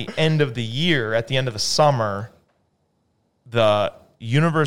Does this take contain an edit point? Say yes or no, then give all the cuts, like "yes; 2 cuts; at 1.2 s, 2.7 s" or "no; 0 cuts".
no; 0 cuts